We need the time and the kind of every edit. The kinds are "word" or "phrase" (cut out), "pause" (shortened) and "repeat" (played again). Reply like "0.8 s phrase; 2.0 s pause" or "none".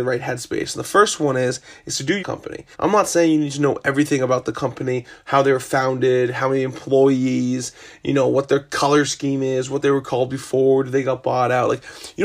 2.2 s phrase; 2.7 s pause